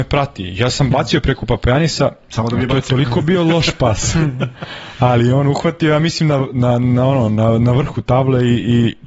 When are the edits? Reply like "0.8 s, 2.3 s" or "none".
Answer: none